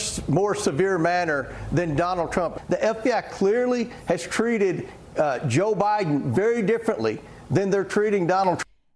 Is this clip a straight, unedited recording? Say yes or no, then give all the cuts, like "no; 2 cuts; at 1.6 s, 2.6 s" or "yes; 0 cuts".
yes; 0 cuts